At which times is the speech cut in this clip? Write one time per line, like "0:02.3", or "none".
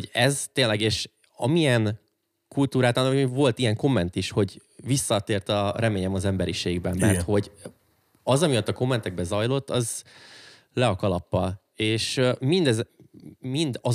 none